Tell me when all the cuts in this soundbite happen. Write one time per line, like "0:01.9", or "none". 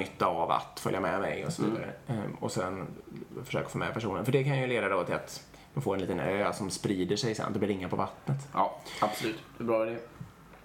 none